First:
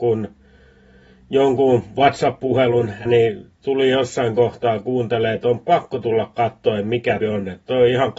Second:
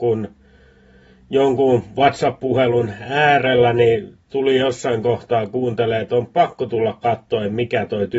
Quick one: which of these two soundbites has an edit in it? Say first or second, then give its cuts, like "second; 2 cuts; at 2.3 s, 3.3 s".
first; 2 cuts; at 3.1 s, 7.2 s